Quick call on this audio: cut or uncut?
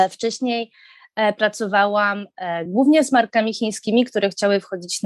uncut